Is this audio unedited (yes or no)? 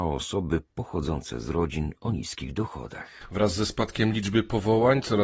yes